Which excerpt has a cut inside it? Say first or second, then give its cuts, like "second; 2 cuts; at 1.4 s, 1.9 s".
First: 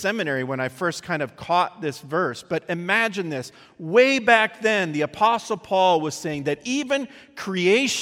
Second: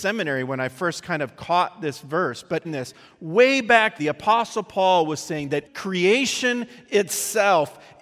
second; 3 cuts; at 2.6 s, 4.0 s, 5.7 s